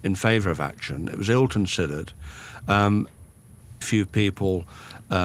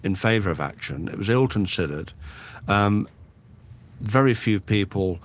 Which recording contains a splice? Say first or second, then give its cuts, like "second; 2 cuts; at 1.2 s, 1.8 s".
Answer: first; 1 cut; at 3.8 s